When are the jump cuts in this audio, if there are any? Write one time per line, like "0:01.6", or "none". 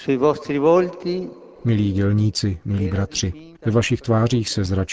0:03.6